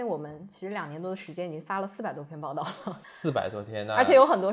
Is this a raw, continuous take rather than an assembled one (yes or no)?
no